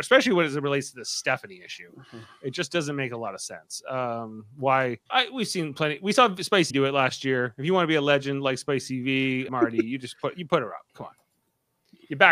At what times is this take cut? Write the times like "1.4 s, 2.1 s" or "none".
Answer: 5.1 s, 6.7 s, 9.5 s, 10.9 s